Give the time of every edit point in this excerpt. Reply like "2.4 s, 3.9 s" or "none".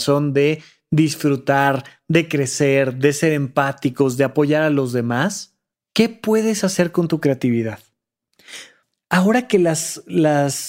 5.7 s, 8.8 s